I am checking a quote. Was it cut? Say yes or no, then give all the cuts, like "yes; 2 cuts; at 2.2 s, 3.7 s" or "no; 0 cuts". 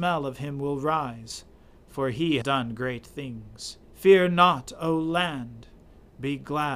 yes; 2 cuts; at 2.4 s, 3.8 s